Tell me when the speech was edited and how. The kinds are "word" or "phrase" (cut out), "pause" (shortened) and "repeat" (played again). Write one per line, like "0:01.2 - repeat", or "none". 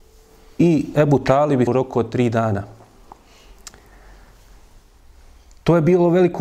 0:01.7 - word